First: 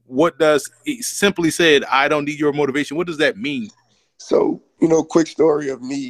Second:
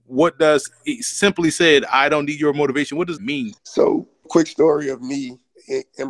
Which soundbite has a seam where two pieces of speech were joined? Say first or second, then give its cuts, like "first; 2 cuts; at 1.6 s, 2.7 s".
second; 3 cuts; at 3.2 s, 3.6 s, 4.3 s